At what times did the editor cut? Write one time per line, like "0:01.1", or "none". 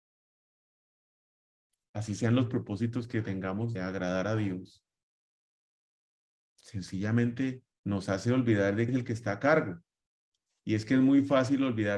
0:03.8
0:07.7
0:08.9

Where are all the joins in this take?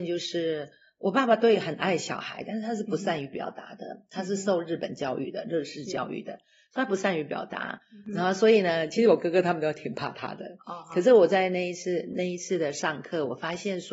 none

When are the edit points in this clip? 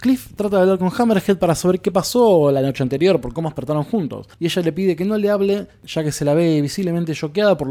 0:04.3

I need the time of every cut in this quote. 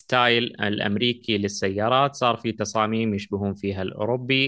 none

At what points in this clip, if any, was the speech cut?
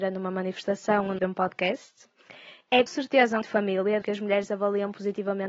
0:01.2
0:02.9
0:03.4
0:04.0

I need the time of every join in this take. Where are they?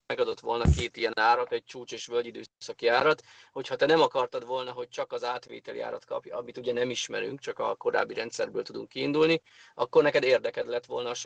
0:02.5

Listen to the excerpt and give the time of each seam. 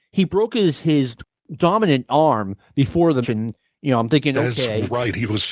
0:03.2

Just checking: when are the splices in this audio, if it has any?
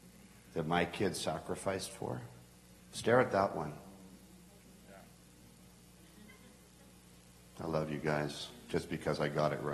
none

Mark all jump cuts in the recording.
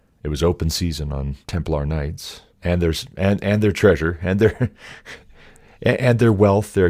0:01.4
0:02.5

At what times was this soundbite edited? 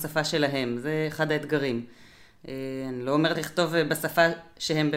0:03.3

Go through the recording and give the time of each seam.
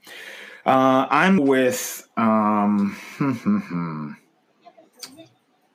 0:01.4

